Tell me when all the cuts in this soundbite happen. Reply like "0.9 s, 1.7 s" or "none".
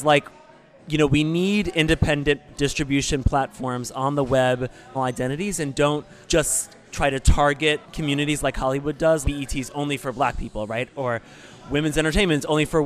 4.9 s, 6.2 s, 7.8 s, 9.2 s